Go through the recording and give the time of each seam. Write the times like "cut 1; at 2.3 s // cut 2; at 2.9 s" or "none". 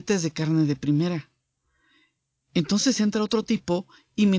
none